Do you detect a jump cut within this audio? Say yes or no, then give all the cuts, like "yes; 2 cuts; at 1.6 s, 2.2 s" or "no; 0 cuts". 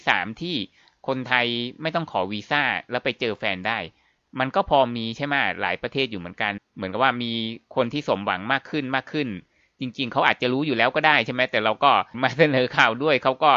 no; 0 cuts